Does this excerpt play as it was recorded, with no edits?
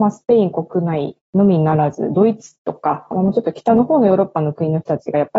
no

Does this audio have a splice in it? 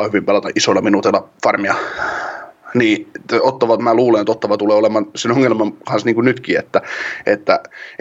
no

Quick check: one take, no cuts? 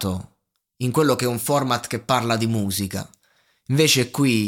yes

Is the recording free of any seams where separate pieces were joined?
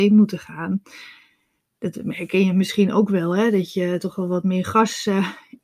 yes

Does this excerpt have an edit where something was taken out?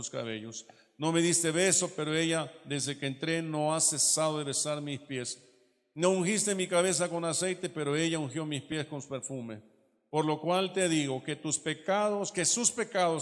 no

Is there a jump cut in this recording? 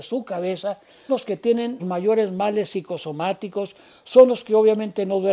yes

